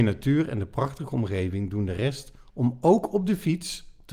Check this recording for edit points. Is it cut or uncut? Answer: uncut